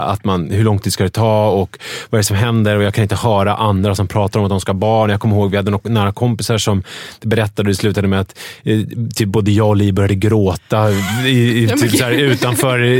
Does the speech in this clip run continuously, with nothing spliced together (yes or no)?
yes